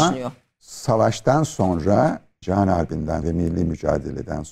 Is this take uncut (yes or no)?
no